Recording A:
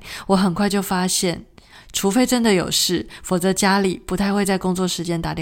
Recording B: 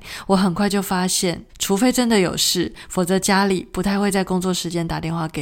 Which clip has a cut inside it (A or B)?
B